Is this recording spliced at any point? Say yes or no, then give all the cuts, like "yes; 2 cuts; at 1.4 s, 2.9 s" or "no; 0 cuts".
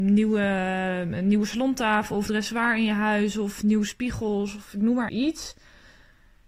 yes; 2 cuts; at 2.3 s, 5.1 s